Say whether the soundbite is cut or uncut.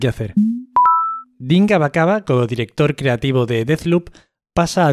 uncut